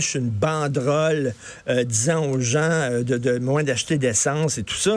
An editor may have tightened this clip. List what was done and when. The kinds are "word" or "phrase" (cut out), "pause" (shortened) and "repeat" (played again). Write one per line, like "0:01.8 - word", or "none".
none